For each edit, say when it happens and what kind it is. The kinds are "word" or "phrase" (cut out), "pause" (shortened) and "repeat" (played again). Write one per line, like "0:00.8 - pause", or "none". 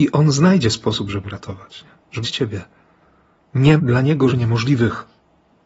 0:01.2 - word
0:02.2 - word
0:03.8 - word
0:04.3 - word